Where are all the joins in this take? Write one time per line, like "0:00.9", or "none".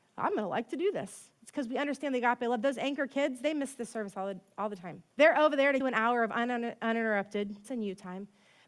0:05.1
0:05.8
0:07.6